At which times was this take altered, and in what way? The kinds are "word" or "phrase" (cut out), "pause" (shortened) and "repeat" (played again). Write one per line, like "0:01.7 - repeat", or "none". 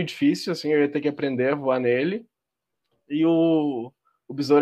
none